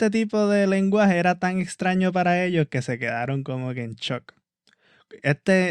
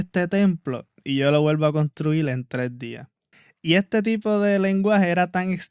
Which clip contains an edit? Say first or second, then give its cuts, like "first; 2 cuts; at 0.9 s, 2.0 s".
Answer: second; 1 cut; at 3.3 s